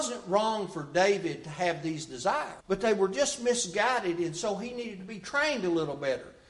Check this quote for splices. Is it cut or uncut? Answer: cut